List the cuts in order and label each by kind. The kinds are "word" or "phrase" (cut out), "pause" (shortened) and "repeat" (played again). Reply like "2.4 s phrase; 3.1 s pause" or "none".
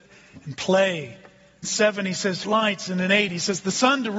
1.6 s phrase; 2.4 s phrase